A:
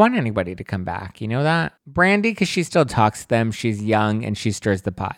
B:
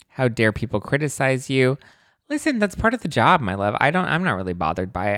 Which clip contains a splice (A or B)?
A